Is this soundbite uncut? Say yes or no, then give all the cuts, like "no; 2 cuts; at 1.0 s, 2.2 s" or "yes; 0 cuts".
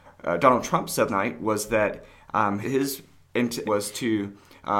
no; 3 cuts; at 1.1 s, 2.6 s, 3.6 s